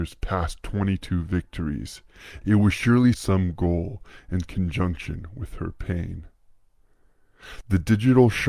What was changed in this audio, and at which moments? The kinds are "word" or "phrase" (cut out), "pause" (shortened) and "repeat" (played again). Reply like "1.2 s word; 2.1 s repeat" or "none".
3.1 s phrase